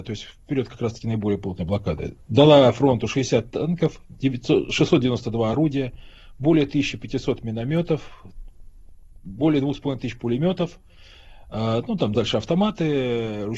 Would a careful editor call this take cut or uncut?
uncut